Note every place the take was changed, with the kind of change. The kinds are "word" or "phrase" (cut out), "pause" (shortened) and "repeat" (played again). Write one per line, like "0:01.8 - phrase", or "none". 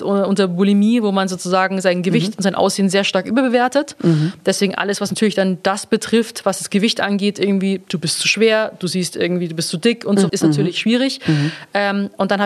0:10.3 - word

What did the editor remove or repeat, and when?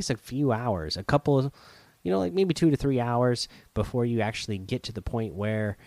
none

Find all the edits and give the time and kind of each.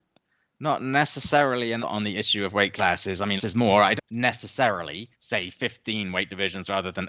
0:01.8 - word
0:03.4 - word
0:04.0 - phrase
0:05.1 - pause

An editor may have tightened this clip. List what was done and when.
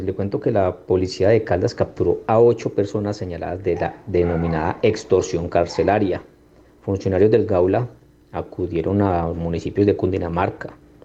none

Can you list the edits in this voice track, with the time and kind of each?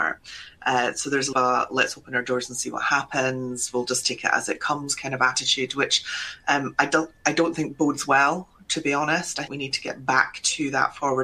0:01.3 - phrase
0:09.5 - word

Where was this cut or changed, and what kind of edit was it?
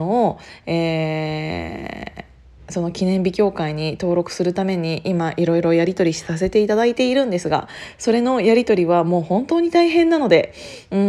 none

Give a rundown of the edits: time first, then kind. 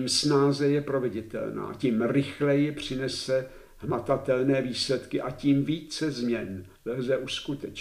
0:06.8 - pause

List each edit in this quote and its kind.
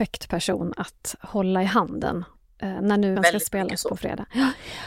0:03.1 - word

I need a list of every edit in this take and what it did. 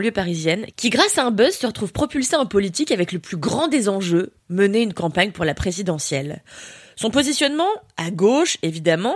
0:04.4 - pause

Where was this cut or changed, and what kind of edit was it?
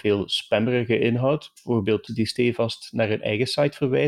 0:02.1 - word

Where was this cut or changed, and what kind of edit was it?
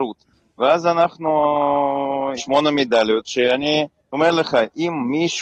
0:02.4 - word
0:03.9 - pause

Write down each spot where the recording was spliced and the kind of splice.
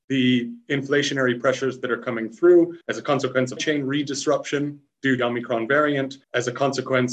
0:02.8 - pause
0:03.6 - word
0:05.2 - phrase
0:06.2 - pause

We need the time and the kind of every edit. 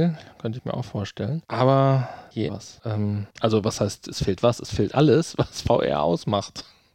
0:02.5 - phrase
0:04.9 - word

